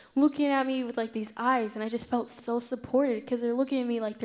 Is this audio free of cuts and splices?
yes; 0 cuts

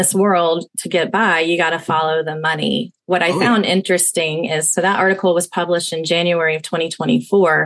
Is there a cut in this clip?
no; 0 cuts

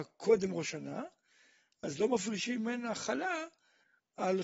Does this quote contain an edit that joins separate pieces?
no; 0 cuts

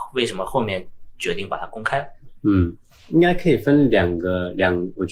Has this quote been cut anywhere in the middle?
no; 0 cuts

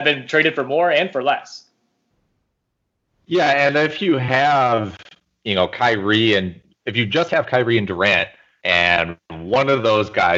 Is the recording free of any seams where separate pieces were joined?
yes; 0 cuts

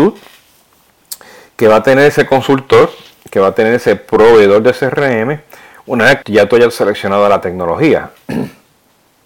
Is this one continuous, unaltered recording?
no; 1 cut; at 6.2 s

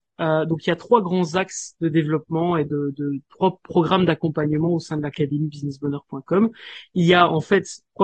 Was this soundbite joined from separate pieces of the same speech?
no; 0 cuts

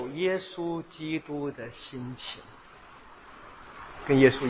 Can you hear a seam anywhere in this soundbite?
no; 0 cuts

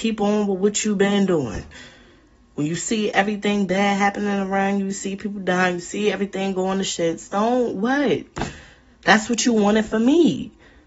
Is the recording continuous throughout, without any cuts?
yes; 0 cuts

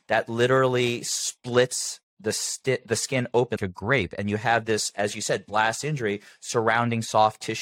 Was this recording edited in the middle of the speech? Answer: yes; 1 cut; at 3.6 s

